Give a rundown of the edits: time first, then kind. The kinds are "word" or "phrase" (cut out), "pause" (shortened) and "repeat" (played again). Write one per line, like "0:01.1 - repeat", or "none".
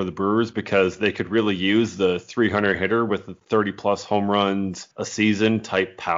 0:04.9 - pause